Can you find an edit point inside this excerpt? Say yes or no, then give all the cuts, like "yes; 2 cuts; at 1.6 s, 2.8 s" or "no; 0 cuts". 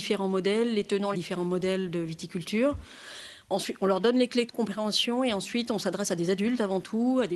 yes; 2 cuts; at 1.1 s, 3.4 s